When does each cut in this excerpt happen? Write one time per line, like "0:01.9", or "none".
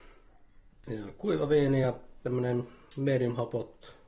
none